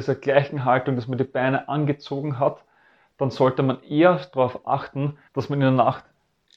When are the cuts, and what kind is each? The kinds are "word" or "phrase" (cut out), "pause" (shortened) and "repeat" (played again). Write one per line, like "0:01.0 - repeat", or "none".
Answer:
0:05.3 - pause